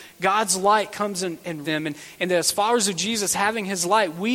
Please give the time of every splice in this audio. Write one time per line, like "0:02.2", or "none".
0:01.6

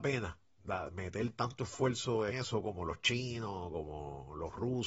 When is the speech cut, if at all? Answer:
0:02.3

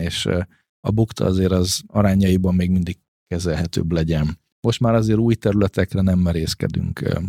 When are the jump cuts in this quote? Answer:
0:04.5

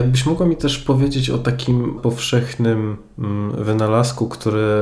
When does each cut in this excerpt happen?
0:02.0

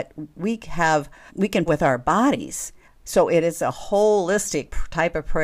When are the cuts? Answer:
0:01.3
0:01.7
0:02.8

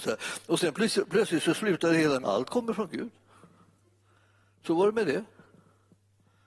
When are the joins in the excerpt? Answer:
0:02.2

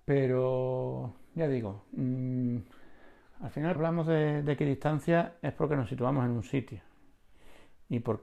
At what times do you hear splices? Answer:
0:03.8

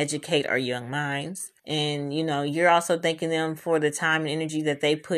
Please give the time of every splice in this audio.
0:01.6

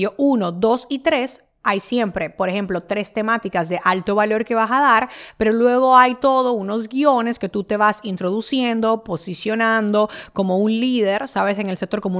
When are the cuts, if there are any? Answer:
none

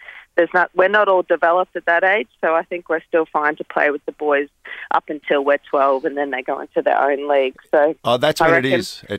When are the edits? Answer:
0:08.0

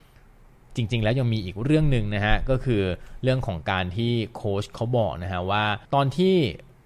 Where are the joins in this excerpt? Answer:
0:05.9

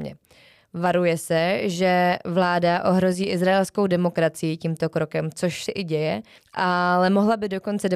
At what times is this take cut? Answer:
0:05.7

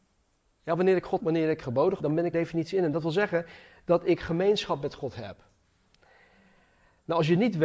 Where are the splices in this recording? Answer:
0:01.2
0:01.6
0:02.0
0:02.3

